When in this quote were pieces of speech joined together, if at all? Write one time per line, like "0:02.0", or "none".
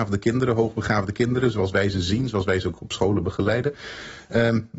none